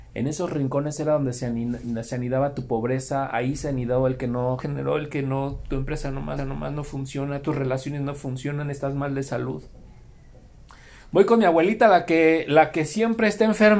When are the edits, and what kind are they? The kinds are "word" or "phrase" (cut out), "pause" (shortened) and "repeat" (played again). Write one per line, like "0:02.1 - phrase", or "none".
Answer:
0:04.6 - phrase
0:06.4 - repeat